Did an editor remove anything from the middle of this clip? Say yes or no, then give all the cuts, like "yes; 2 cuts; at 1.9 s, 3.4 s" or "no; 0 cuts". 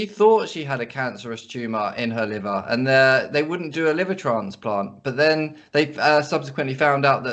no; 0 cuts